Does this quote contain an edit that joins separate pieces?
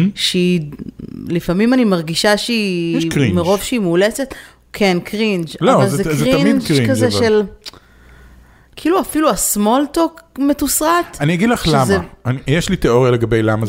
no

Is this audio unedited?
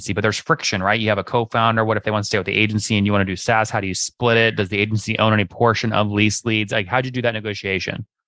yes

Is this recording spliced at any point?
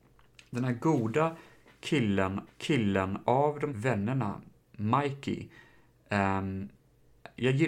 yes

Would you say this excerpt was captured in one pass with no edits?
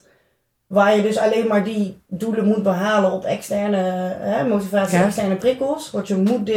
yes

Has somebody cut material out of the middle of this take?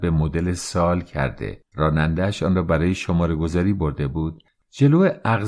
yes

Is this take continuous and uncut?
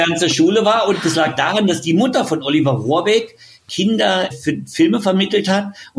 no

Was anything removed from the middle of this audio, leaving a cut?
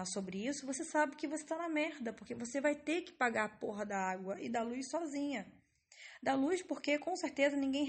no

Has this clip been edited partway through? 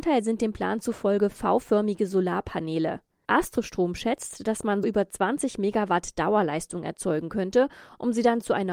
yes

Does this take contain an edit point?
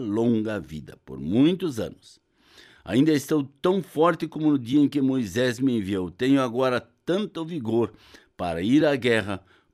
no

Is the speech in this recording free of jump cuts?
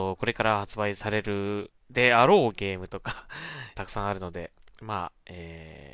no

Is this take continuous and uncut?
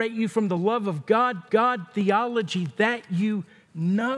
no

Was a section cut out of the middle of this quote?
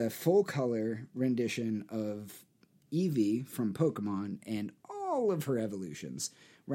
no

